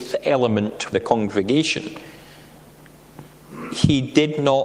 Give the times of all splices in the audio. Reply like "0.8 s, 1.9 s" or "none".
0.9 s